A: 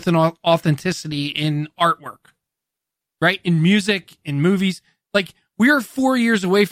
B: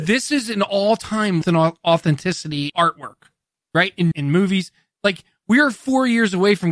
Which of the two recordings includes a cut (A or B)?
B